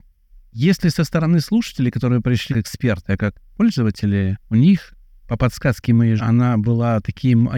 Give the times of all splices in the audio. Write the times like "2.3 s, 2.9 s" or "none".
2.5 s, 4.4 s, 6.2 s